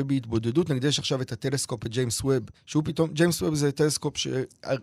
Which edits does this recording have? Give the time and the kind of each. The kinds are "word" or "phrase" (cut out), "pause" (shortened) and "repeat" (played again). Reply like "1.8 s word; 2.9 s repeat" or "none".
2.5 s pause